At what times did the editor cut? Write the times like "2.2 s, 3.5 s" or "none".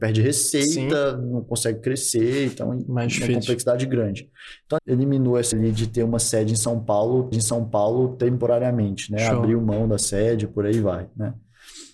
4.8 s, 5.5 s, 7.3 s